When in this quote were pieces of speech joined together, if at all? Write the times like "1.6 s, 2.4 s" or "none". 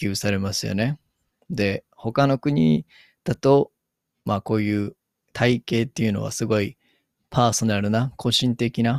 none